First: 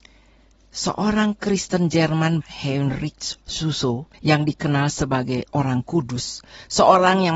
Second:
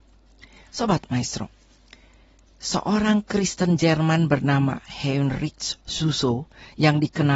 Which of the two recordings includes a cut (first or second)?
first